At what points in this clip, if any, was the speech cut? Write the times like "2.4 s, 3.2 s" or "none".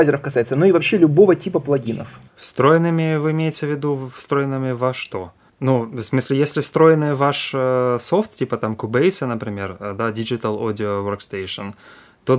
2.3 s, 5.5 s